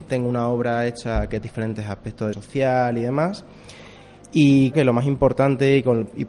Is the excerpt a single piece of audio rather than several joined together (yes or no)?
no